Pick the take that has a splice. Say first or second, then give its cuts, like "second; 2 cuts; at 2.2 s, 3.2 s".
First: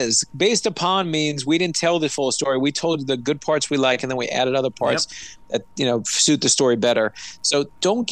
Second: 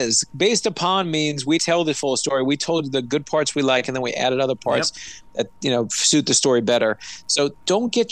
second; 1 cut; at 1.6 s